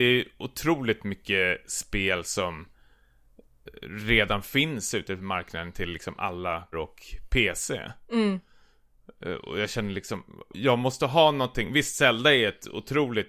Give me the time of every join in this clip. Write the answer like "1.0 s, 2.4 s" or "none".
6.7 s, 10.5 s

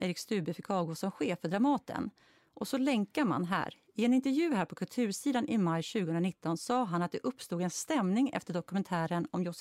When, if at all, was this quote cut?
none

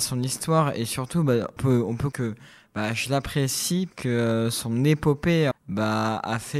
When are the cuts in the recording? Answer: 1.6 s, 2.1 s, 3.9 s, 5.5 s

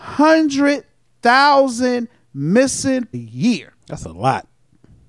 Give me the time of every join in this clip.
3.1 s, 3.8 s

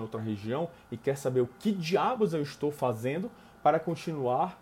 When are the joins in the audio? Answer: none

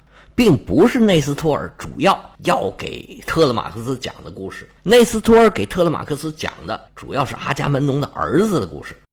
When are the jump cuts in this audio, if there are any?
2.3 s, 4.8 s, 6.9 s

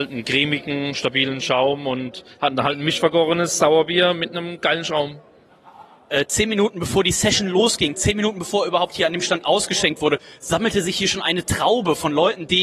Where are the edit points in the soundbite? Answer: none

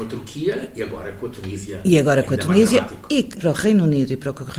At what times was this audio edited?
3.4 s

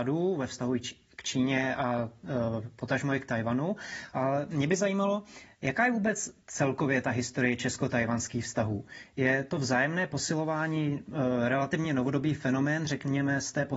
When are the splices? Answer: none

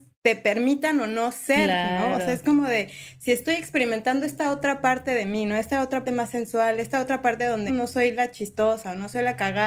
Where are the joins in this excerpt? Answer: 6.0 s, 7.7 s

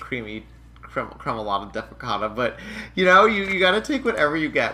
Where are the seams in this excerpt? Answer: none

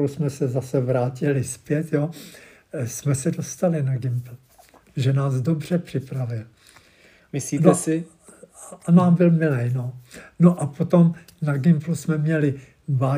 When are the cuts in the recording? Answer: none

